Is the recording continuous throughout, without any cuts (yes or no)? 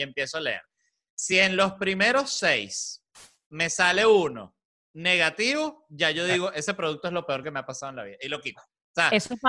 yes